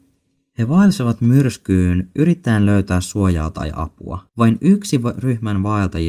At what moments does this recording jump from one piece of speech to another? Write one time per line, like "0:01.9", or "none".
0:04.3